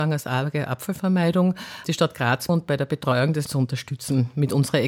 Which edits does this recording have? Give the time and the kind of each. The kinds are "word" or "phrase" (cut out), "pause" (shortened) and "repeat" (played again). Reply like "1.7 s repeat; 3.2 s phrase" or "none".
1.8 s word; 2.5 s phrase; 3.5 s word